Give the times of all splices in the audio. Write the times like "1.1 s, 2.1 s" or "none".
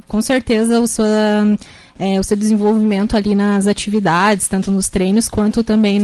none